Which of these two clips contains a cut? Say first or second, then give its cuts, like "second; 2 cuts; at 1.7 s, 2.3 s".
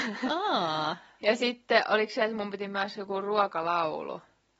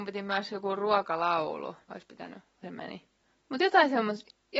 second; 3 cuts; at 1.8 s, 2.6 s, 3.3 s